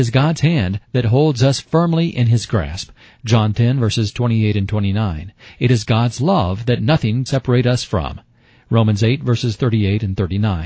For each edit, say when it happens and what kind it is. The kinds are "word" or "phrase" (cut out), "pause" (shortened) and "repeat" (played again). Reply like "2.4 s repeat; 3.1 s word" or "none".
7.3 s word